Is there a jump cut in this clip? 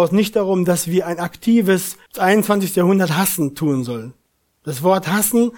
yes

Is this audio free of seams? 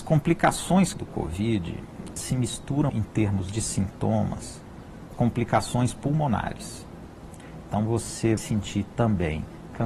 no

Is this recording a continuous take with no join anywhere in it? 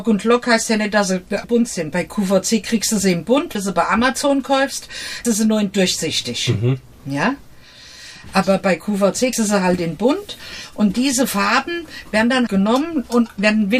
no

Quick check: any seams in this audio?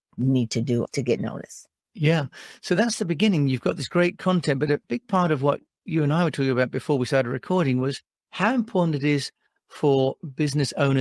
no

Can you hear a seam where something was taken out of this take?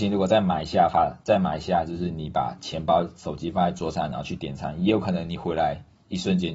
no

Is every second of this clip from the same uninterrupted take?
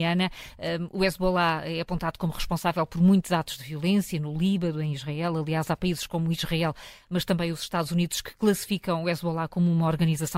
yes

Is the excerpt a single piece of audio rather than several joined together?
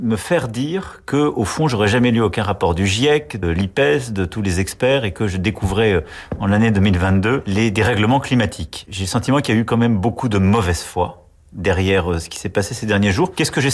no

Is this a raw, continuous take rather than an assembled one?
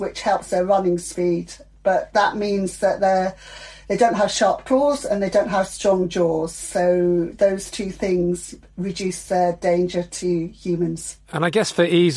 yes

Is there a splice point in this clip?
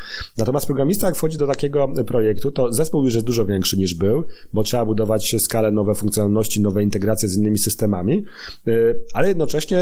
no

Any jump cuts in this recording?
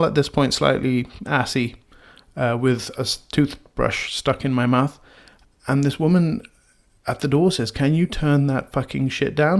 no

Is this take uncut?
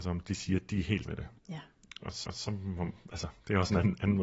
no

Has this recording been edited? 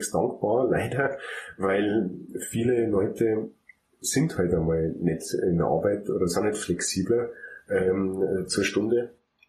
no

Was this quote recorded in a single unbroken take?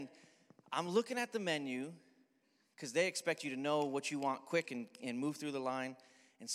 yes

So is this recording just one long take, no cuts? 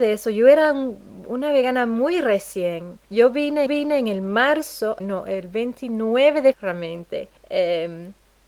no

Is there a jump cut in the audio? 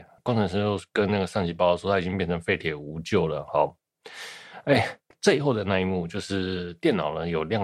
yes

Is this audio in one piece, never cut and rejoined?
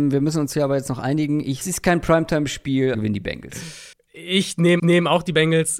no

